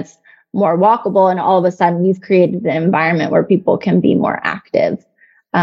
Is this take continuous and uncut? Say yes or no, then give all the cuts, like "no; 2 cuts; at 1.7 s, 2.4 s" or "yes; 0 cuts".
yes; 0 cuts